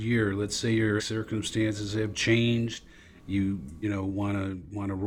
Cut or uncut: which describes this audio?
cut